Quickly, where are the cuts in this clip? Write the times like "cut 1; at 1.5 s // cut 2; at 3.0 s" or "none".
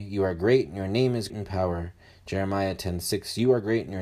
cut 1; at 1.3 s